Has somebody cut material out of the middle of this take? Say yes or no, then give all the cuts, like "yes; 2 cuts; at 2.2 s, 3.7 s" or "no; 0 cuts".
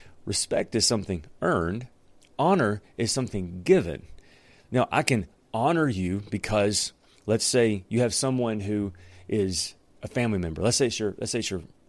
no; 0 cuts